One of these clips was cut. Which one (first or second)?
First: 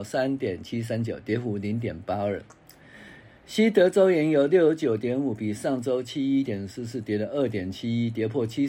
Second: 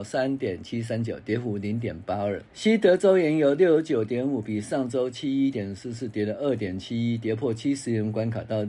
second